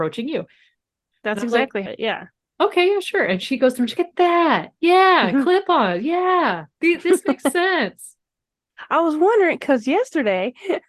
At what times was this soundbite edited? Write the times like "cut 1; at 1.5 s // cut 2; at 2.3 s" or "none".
cut 1; at 1.9 s // cut 2; at 4.0 s

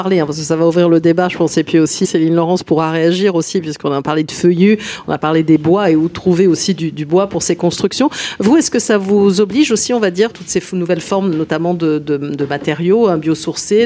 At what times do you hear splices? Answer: cut 1; at 2.0 s // cut 2; at 10.3 s

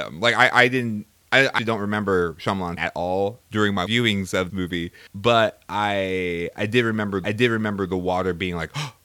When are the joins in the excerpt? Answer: cut 1; at 1.6 s // cut 2; at 2.8 s // cut 3; at 3.4 s // cut 4; at 3.9 s // cut 5; at 4.5 s // cut 6; at 5.1 s // cut 7; at 7.2 s

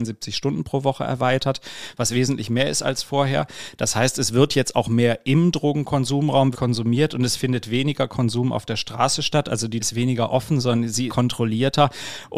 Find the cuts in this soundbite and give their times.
cut 1; at 6.5 s // cut 2; at 9.8 s // cut 3; at 11.1 s

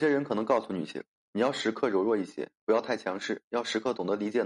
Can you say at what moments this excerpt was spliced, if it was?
none

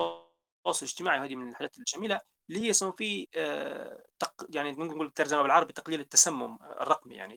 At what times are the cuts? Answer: none

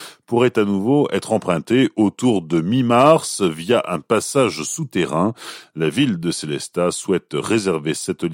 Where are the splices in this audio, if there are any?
none

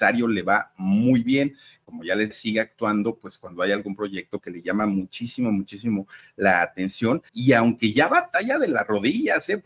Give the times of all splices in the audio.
cut 1; at 2.3 s // cut 2; at 7.3 s

